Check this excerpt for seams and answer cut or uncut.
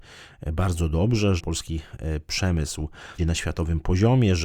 cut